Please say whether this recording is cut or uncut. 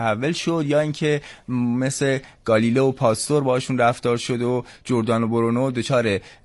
uncut